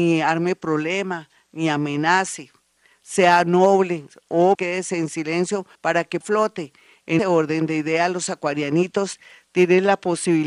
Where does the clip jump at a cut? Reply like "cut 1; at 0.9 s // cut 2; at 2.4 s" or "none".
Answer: cut 1; at 4.5 s // cut 2; at 5.7 s // cut 3; at 6.2 s // cut 4; at 7.2 s